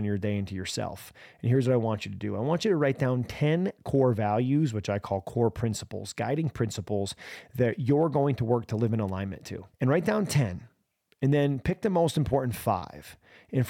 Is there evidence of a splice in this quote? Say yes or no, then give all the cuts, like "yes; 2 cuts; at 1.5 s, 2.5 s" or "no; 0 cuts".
yes; 1 cut; at 9.7 s